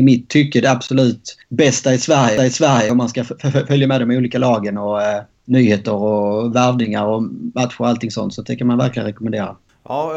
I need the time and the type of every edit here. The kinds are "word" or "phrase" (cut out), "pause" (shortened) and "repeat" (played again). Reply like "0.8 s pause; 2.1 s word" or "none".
2.4 s repeat